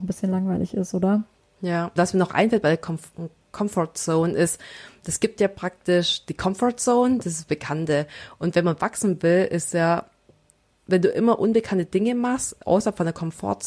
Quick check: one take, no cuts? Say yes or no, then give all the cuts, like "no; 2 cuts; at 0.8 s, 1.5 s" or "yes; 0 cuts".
no; 1 cut; at 2.0 s